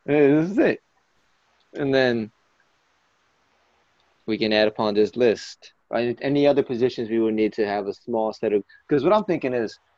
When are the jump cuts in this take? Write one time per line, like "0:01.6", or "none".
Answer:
none